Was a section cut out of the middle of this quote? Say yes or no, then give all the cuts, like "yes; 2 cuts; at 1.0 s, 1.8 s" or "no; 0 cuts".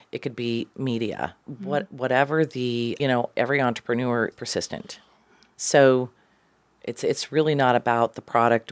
yes; 3 cuts; at 1.4 s, 3.0 s, 4.3 s